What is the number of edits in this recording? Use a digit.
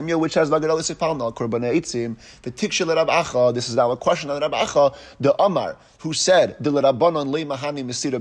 0